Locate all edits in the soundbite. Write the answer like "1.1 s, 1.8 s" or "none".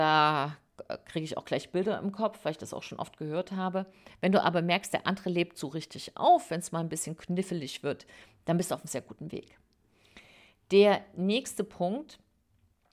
none